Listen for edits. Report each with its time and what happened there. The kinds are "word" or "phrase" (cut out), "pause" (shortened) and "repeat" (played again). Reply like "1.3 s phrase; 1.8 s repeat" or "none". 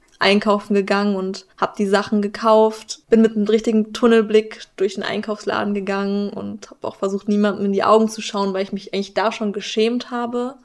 1.5 s pause; 3.0 s pause